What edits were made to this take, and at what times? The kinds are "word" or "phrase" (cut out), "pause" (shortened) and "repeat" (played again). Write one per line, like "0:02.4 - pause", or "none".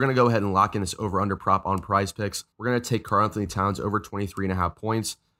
0:02.5 - pause